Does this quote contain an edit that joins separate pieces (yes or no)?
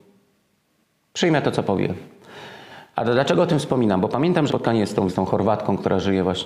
yes